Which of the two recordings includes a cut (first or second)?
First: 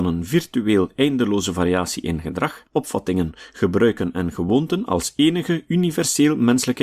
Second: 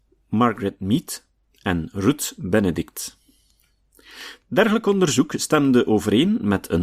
first